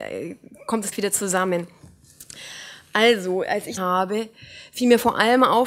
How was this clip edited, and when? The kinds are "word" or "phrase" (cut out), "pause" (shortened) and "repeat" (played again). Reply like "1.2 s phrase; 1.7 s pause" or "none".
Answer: 0.9 s word; 3.8 s phrase